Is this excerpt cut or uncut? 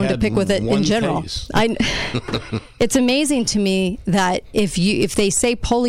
uncut